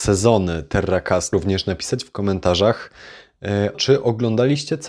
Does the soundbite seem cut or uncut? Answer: cut